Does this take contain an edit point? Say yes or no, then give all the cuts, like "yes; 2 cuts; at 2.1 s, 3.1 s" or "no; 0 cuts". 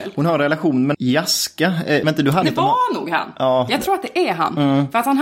yes; 3 cuts; at 0.9 s, 2.0 s, 2.4 s